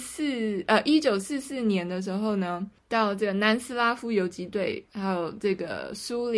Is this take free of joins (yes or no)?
no